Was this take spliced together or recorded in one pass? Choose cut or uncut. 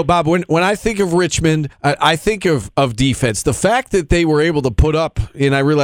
cut